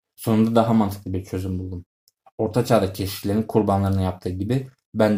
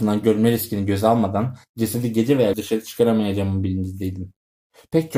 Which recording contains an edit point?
second; 1 cut; at 2.5 s

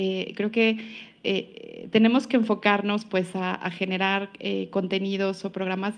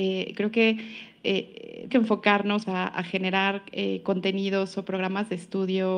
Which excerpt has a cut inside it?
second; 2 cuts; at 1.9 s, 2.6 s

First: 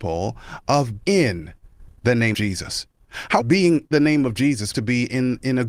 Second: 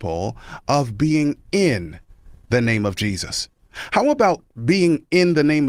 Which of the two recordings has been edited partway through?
first; 5 cuts; at 1.0 s, 2.3 s, 3.4 s, 3.9 s, 4.7 s

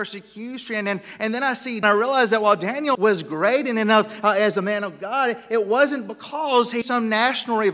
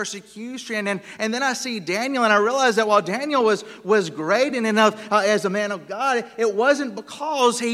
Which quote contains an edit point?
first; 3 cuts; at 1.8 s, 2.9 s, 6.8 s

